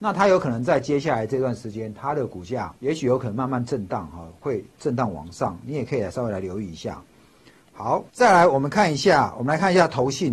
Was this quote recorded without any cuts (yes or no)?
no